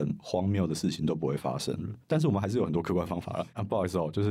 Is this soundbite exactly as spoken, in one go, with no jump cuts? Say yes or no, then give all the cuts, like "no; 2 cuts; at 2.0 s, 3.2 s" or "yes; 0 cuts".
no; 1 cut; at 2.0 s